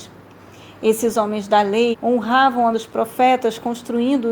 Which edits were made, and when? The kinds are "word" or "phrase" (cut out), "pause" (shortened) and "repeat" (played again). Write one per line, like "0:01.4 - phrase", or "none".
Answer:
0:01.9 - phrase
0:02.7 - word